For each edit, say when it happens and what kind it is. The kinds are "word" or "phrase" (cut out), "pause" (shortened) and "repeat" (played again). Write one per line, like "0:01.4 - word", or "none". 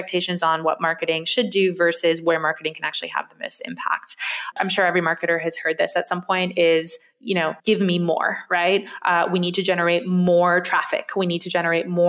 0:07.6 - pause